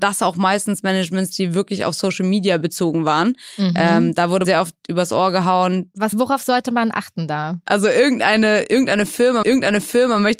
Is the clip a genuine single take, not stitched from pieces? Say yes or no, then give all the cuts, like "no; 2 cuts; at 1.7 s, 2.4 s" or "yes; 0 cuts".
no; 3 cuts; at 4.4 s, 6.1 s, 9.4 s